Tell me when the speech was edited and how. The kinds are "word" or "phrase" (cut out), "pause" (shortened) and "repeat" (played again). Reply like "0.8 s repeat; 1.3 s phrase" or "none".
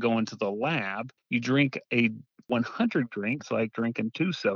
1.2 s pause; 1.8 s pause; 3.1 s phrase; 3.4 s word